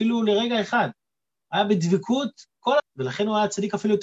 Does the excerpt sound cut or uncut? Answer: cut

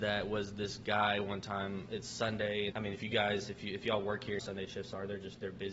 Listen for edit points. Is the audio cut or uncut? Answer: cut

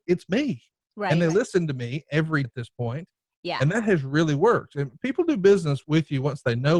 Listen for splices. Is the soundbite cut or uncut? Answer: cut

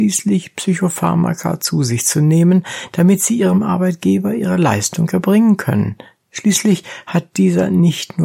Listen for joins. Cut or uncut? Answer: uncut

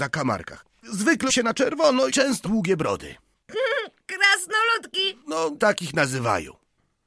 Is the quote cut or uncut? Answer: cut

